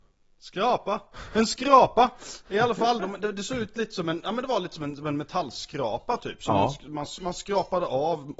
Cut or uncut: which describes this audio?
uncut